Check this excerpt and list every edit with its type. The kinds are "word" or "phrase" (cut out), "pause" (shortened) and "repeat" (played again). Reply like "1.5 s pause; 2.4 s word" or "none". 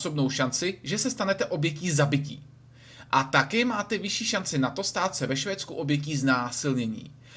none